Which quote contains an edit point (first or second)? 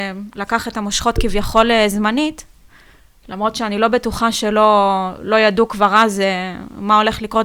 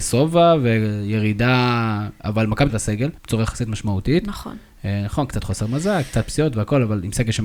second